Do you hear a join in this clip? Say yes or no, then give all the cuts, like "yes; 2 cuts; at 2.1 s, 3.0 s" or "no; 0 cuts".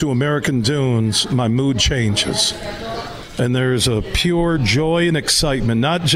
no; 0 cuts